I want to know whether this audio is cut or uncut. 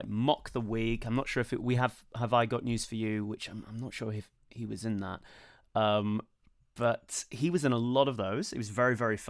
uncut